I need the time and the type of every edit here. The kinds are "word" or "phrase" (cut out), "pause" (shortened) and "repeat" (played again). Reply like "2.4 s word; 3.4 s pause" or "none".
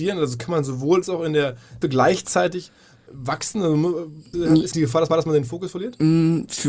1.0 s phrase; 1.8 s word; 3.1 s word; 4.3 s word; 4.7 s word; 5.1 s repeat